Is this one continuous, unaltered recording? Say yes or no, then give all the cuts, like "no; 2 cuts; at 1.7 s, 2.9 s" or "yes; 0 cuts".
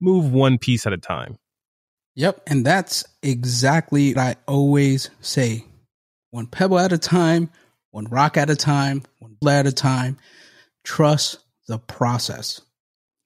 no; 2 cuts; at 4.2 s, 9.4 s